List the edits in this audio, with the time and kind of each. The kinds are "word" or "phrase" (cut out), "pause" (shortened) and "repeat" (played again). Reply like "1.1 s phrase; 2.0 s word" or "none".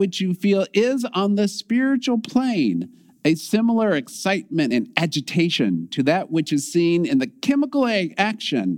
none